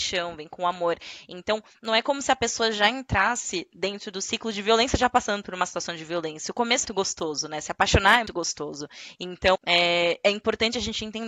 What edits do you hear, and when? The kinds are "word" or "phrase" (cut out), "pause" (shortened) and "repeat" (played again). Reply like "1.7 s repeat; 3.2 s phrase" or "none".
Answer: 6.8 s word; 8.3 s word; 9.5 s word